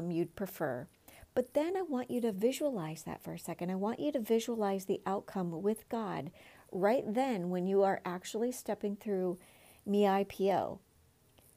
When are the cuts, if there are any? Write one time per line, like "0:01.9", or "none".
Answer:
none